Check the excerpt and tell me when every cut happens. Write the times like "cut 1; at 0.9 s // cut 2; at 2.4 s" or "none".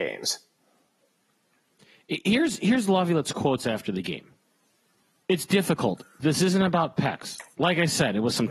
none